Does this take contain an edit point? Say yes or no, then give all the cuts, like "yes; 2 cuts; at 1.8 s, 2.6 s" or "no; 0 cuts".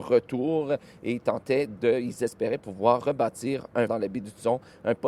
yes; 1 cut; at 3.9 s